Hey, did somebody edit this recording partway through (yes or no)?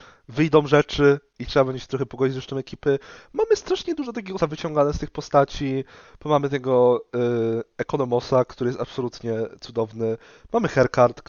yes